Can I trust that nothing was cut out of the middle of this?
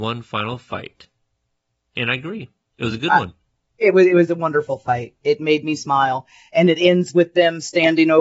yes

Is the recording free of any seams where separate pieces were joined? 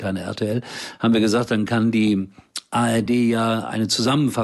yes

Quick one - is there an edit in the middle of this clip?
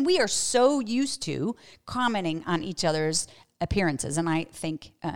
no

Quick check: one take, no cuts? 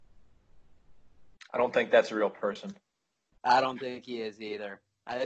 yes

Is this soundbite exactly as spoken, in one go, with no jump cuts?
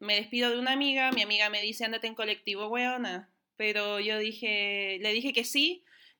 yes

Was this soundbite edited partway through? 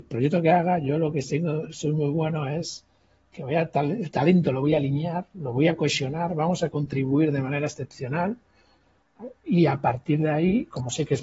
no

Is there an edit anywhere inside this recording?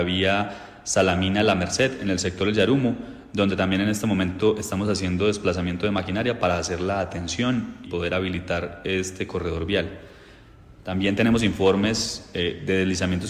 yes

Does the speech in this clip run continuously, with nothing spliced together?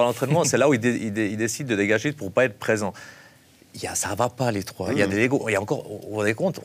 yes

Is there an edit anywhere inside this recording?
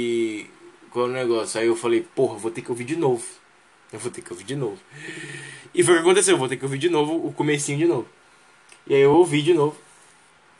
no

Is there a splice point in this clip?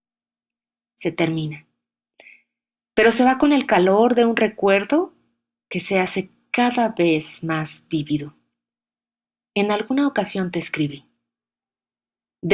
no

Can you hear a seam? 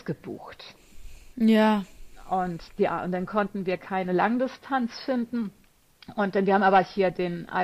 yes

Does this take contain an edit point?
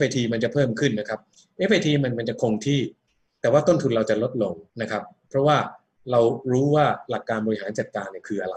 yes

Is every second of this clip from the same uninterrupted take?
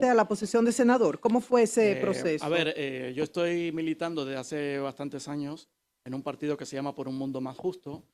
yes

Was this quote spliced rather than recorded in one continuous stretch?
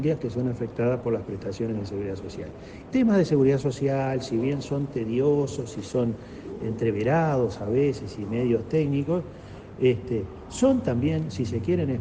yes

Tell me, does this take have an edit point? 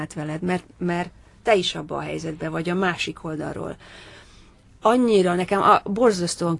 no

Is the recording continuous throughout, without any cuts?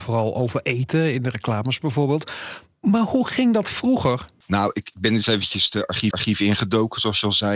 no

